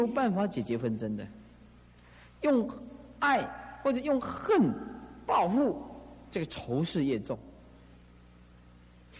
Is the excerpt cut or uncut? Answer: uncut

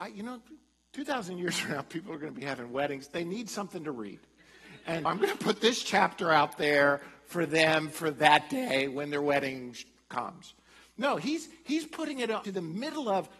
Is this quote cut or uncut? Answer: cut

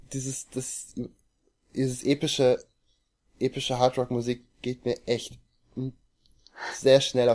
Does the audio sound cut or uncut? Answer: uncut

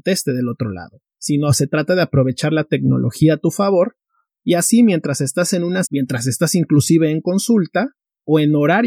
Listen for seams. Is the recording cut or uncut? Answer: cut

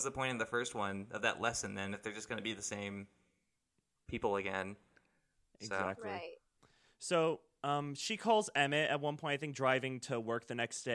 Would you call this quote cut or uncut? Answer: uncut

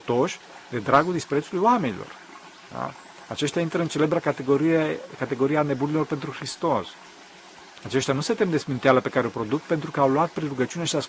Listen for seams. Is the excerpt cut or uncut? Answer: uncut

